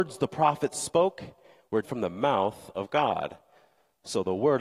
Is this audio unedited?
no; 1 cut; at 1.8 s

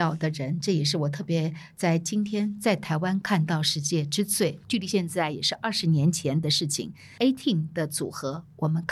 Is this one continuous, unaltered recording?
no; 1 cut; at 4.6 s

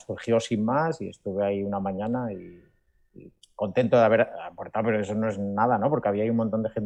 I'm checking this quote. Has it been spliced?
no; 0 cuts

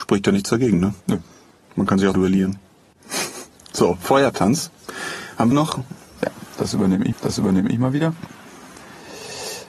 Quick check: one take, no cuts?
no; 4 cuts; at 1.0 s, 2.1 s, 5.5 s, 7.1 s

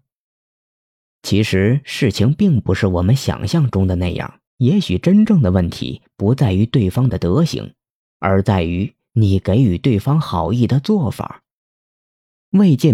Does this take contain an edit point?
yes; 1 cut; at 4.5 s

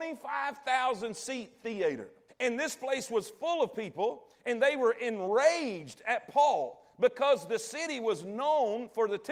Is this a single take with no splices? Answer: no; 1 cut; at 2.3 s

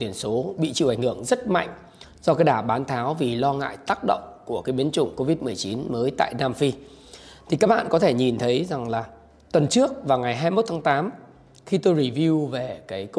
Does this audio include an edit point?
no; 0 cuts

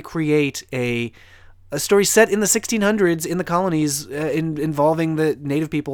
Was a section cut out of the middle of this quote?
no; 0 cuts

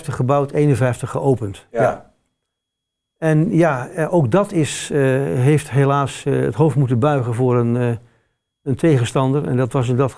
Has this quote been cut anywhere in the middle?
no; 0 cuts

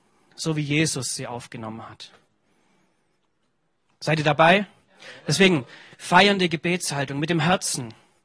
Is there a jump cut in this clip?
no; 0 cuts

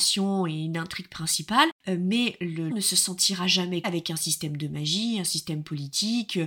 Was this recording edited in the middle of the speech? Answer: yes; 3 cuts; at 1.8 s, 2.7 s, 3.8 s

